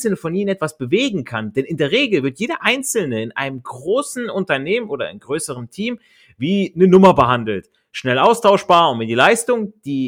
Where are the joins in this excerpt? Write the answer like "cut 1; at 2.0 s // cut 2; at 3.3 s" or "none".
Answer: none